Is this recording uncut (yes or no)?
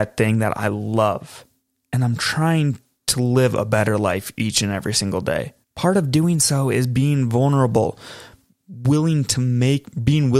no